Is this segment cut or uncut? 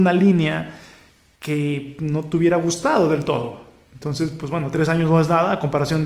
uncut